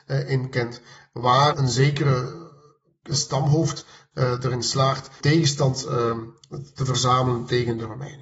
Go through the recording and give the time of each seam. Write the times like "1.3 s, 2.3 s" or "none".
1.5 s, 3.1 s, 4.1 s, 5.2 s